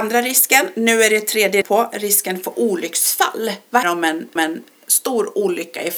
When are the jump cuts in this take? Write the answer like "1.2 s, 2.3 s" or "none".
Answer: 1.6 s, 3.8 s, 4.4 s